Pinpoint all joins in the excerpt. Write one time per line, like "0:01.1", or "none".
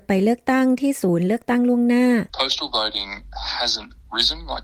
0:02.3